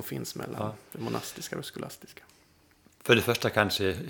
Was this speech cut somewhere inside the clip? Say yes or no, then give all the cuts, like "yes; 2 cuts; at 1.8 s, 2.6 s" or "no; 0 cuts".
no; 0 cuts